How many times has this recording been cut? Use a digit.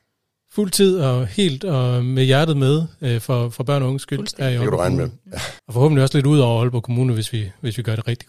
1